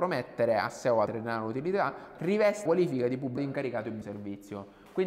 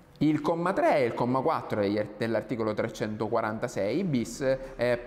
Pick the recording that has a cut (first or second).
first